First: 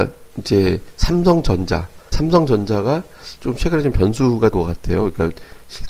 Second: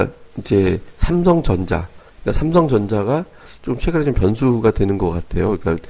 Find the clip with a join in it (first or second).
first